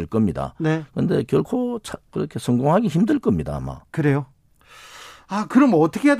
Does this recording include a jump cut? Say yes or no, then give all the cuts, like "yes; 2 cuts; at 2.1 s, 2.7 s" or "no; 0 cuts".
yes; 1 cut; at 2.1 s